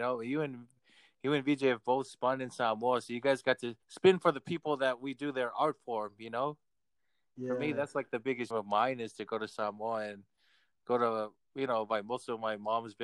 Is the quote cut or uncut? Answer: cut